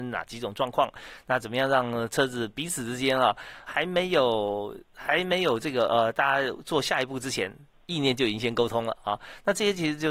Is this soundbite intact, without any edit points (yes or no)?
no